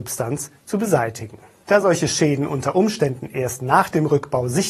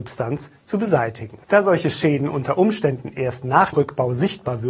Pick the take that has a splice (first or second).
second